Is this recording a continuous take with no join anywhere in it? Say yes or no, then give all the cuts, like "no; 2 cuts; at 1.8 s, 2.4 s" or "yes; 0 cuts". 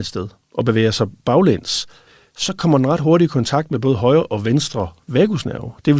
yes; 0 cuts